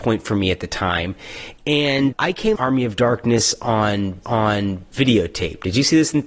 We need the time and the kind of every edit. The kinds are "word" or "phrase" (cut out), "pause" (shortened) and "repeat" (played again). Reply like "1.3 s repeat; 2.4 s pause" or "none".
2.1 s word; 2.6 s word; 4.2 s repeat